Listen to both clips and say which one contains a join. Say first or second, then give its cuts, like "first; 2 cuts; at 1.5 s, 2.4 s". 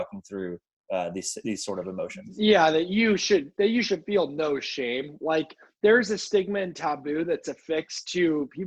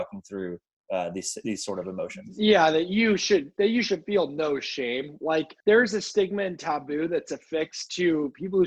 second; 1 cut; at 5.6 s